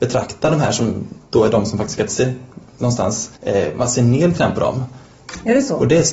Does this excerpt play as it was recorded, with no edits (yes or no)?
no